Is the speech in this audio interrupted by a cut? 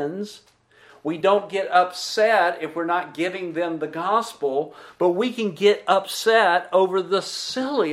no; 0 cuts

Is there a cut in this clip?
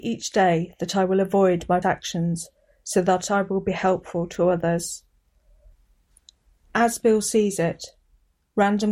yes; 1 cut; at 1.8 s

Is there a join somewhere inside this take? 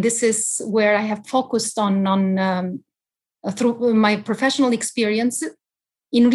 no; 0 cuts

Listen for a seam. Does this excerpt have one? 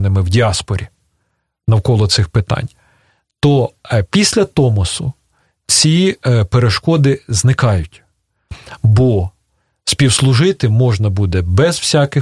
no; 0 cuts

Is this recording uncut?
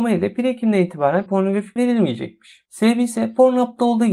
no; 2 cuts; at 1.3 s, 1.8 s

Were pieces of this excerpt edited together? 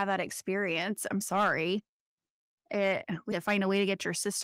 yes; 2 cuts; at 1.2 s, 3.3 s

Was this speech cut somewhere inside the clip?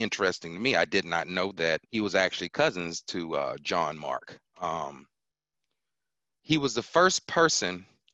yes; 2 cuts; at 1.8 s, 4.4 s

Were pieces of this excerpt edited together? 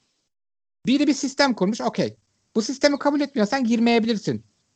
no; 0 cuts

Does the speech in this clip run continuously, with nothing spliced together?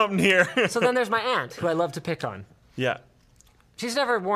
yes; 0 cuts

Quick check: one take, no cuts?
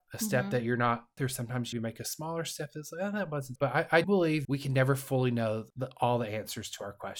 no; 6 cuts; at 1.2 s, 1.7 s, 3.6 s, 4.0 s, 4.4 s, 5.7 s

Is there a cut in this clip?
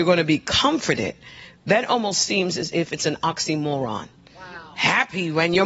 no; 0 cuts

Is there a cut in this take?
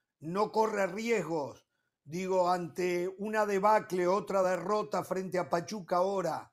no; 0 cuts

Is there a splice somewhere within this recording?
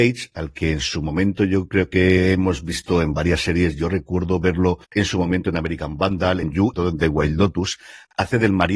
yes; 3 cuts; at 4.8 s, 6.4 s, 6.7 s

